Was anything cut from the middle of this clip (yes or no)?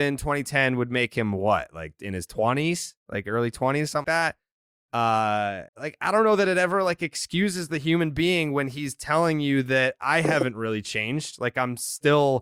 yes